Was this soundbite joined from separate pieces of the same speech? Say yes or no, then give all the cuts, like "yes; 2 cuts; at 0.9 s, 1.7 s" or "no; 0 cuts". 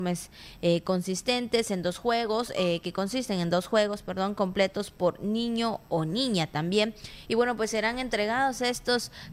no; 0 cuts